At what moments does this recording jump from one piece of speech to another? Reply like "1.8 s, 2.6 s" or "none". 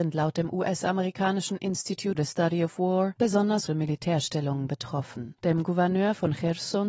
2.1 s, 3.7 s, 5.4 s